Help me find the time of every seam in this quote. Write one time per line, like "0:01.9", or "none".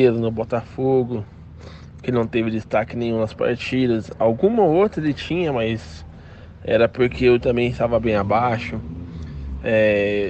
0:07.4